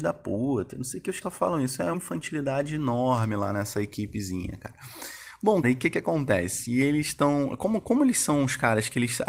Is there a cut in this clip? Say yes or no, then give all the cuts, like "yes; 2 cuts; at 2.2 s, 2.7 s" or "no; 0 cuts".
yes; 3 cuts; at 1.2 s, 1.9 s, 5.6 s